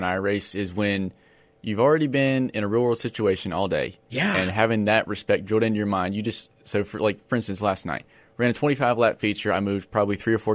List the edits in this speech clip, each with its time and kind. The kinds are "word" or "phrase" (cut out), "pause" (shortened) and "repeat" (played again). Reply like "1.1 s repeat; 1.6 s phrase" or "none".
none